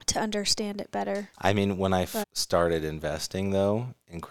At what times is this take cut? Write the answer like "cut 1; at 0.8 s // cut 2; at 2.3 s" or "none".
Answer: cut 1; at 1.3 s // cut 2; at 2.2 s